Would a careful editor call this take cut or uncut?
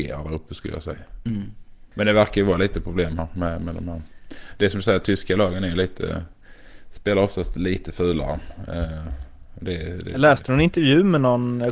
uncut